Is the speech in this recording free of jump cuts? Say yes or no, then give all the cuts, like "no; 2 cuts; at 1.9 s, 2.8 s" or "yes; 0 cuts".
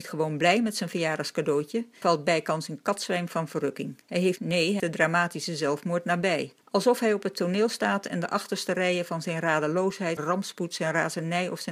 no; 6 cuts; at 2.0 s, 4.0 s, 4.4 s, 4.8 s, 6.6 s, 10.2 s